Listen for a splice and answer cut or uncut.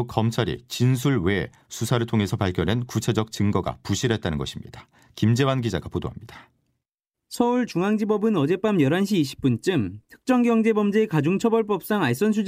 uncut